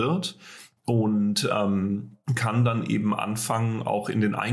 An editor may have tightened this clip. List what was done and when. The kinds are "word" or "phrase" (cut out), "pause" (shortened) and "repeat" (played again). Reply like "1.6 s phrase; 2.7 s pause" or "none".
2.2 s pause